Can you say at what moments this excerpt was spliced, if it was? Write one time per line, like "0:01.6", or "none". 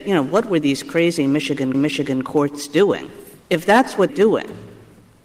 0:01.7
0:03.4
0:04.1